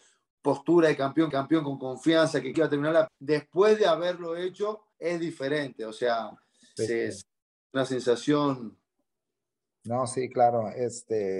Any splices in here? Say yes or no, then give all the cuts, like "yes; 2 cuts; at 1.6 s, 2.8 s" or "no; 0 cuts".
yes; 5 cuts; at 1.3 s, 2.5 s, 3.1 s, 4.9 s, 6.8 s